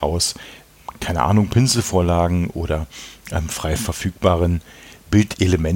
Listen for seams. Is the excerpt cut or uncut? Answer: uncut